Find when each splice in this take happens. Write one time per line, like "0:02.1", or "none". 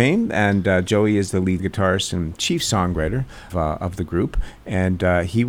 0:01.6
0:03.5